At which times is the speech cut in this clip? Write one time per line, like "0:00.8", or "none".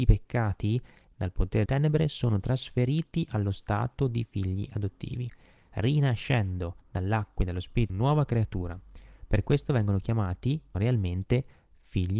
0:01.1
0:01.7
0:06.8
0:07.9
0:10.7